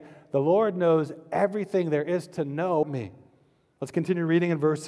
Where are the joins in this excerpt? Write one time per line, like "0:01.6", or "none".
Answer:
0:02.8